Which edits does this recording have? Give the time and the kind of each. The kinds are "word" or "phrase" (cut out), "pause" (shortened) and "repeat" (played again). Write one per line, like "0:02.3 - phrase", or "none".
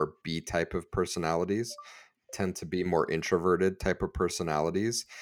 none